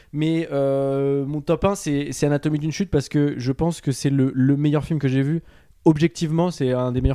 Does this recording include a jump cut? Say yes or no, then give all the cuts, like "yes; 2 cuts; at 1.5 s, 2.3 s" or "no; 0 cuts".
no; 0 cuts